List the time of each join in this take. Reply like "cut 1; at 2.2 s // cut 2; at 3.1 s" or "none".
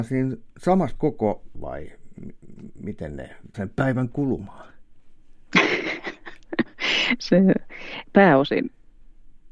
cut 1; at 1.0 s // cut 2; at 1.5 s // cut 3; at 3.5 s // cut 4; at 8.0 s